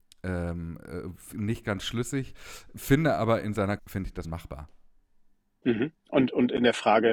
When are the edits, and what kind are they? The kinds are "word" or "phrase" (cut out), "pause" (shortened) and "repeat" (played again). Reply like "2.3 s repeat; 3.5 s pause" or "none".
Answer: 1.3 s word; 3.8 s word; 4.2 s word